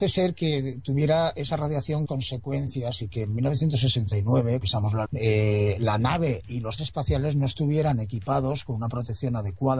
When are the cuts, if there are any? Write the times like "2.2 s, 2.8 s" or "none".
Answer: 2.1 s, 4.6 s, 5.1 s, 6.8 s